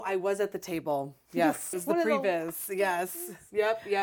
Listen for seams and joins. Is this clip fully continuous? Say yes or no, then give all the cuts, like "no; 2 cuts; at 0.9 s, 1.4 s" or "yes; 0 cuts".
no; 1 cut; at 1.7 s